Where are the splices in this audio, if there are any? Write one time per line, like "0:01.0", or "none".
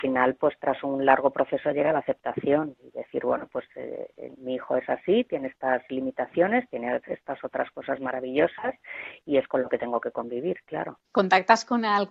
0:11.0